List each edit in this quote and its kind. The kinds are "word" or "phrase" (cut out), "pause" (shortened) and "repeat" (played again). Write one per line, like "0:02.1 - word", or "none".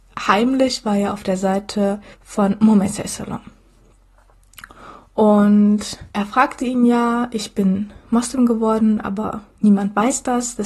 0:02.1 - pause
0:06.1 - pause